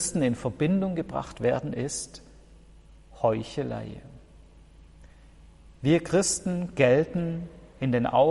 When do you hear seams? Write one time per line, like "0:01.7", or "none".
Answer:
none